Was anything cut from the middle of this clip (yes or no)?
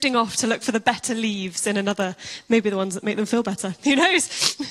no